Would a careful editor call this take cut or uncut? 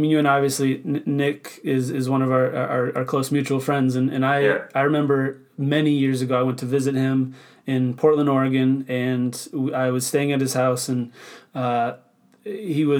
uncut